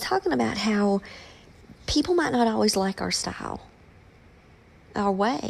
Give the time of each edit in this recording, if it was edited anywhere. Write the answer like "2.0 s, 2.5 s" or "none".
none